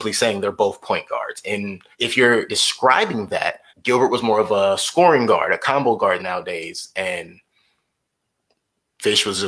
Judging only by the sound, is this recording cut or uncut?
cut